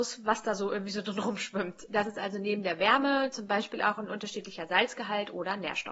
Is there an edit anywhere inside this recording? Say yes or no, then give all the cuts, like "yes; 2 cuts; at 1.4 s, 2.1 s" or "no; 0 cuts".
no; 0 cuts